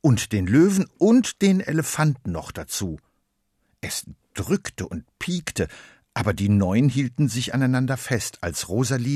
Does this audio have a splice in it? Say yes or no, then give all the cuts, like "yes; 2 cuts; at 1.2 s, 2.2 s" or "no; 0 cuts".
no; 0 cuts